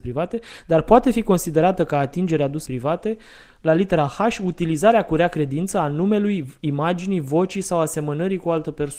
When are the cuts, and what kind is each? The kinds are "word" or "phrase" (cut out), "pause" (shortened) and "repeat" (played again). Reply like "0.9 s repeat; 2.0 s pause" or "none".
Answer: 2.7 s word